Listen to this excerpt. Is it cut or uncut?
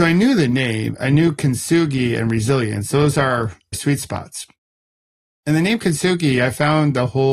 cut